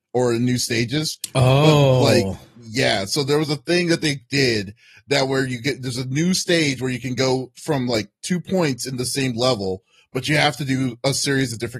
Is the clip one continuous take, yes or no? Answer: yes